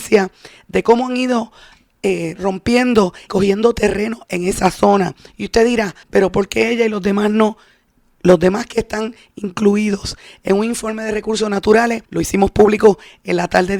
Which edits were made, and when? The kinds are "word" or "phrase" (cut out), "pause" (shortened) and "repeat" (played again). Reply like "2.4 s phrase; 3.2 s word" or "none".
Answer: 3.3 s phrase; 6.0 s pause; 12.0 s pause